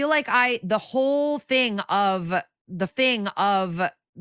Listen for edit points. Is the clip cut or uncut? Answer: cut